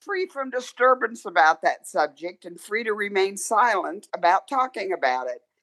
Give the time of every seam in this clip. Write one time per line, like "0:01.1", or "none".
none